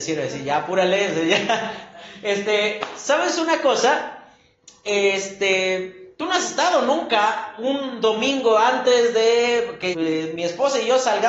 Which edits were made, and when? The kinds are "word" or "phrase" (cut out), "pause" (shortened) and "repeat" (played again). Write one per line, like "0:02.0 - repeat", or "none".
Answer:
0:09.9 - word